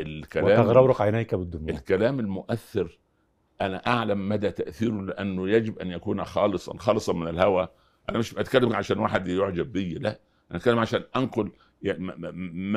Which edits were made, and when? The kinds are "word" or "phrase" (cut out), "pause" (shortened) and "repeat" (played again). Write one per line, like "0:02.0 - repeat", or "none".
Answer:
none